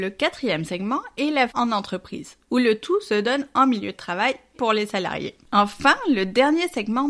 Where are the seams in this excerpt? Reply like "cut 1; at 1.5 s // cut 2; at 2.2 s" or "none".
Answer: cut 1; at 1.5 s // cut 2; at 4.5 s